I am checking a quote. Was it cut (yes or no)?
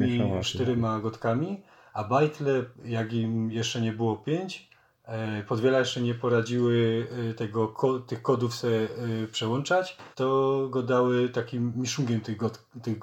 yes